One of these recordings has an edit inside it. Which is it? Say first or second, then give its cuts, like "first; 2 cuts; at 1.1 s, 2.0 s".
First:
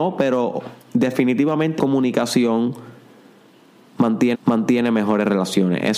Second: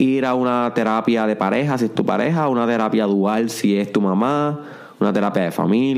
first; 2 cuts; at 1.8 s, 4.3 s